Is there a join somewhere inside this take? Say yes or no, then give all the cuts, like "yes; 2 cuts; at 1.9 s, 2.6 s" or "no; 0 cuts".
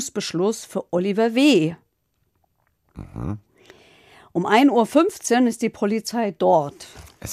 no; 0 cuts